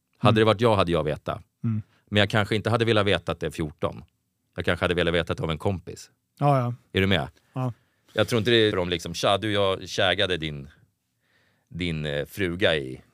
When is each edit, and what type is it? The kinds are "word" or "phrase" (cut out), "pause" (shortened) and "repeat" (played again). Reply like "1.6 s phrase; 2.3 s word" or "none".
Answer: 1.0 s word; 1.5 s pause; 3.5 s phrase; 8.7 s word